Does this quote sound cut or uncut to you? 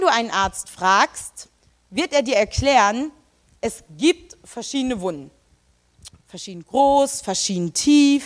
uncut